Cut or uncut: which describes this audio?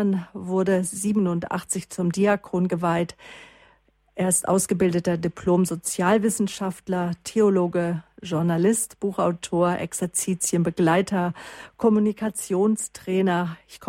uncut